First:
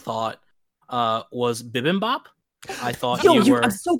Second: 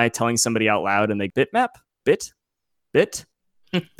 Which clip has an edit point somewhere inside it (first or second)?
second